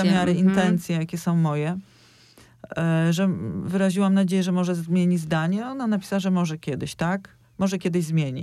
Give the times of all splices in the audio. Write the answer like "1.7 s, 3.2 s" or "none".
none